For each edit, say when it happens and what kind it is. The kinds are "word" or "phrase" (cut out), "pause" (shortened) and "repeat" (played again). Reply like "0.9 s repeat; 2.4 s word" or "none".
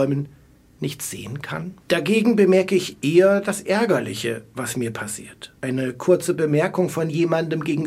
1.8 s pause; 5.6 s pause